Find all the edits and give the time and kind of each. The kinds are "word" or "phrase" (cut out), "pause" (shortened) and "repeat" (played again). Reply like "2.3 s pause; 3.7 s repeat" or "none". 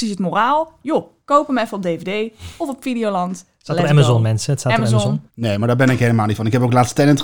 5.3 s pause